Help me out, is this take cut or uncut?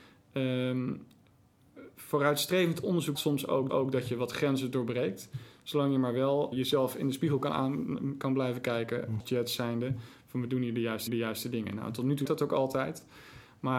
cut